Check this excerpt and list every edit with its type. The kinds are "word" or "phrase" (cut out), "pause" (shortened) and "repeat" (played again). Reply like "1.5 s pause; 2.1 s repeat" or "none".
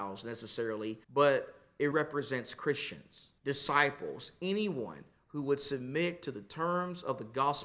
1.0 s pause; 1.9 s word; 3.4 s pause

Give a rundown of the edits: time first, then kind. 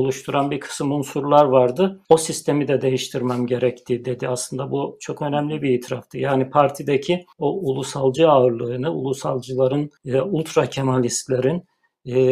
2.0 s pause; 7.3 s pause; 10.0 s pause

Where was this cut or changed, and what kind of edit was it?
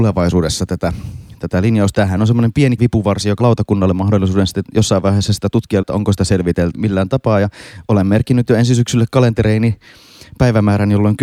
1.9 s word; 2.8 s word; 3.4 s word; 5.8 s word; 6.7 s word

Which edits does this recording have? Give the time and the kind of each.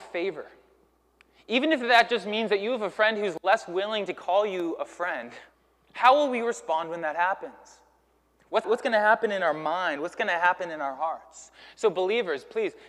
5.5 s pause; 8.6 s word

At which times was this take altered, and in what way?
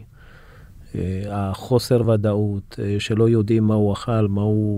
none

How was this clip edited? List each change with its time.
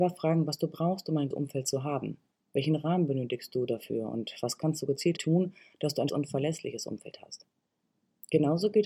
1.3 s word; 5.2 s word; 6.1 s word

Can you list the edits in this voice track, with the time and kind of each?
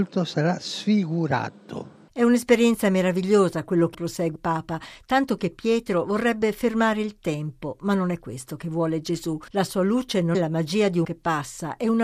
3.9 s word; 4.4 s word; 9.5 s pause; 10.3 s word; 11.0 s word

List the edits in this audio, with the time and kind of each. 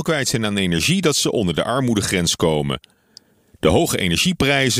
none

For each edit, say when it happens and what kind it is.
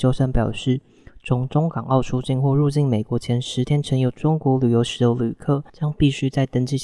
5.7 s pause

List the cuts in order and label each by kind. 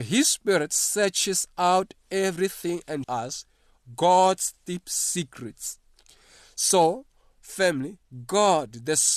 3.0 s word

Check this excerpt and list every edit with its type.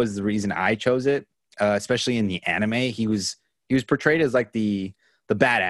none

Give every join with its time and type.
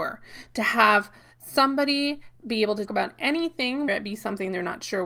2.4 s word; 2.9 s word; 3.9 s word

